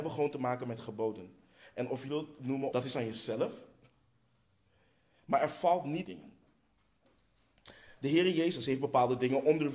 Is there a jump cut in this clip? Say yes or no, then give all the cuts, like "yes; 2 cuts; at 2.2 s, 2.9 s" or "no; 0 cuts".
yes; 3 cuts; at 2.1 s, 2.7 s, 6.0 s